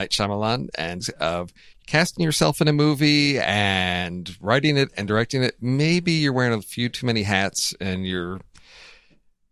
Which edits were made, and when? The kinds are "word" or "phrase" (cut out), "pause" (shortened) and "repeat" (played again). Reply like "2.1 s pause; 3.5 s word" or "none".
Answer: 1.0 s phrase; 1.8 s word